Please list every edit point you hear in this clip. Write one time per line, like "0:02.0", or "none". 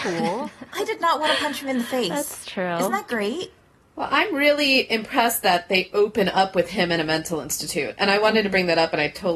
none